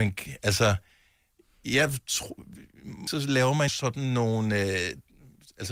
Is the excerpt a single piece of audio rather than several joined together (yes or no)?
no